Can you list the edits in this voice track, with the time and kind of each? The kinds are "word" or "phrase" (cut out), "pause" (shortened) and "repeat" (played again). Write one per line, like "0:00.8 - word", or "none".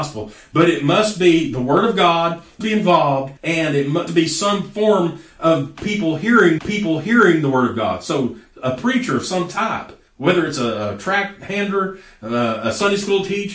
0:02.6 - phrase
0:03.4 - pause
0:04.1 - phrase
0:06.6 - repeat
0:10.1 - pause